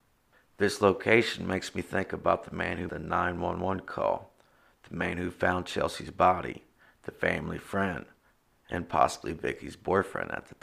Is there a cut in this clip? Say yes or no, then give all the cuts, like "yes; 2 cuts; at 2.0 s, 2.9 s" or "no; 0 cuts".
yes; 1 cut; at 2.9 s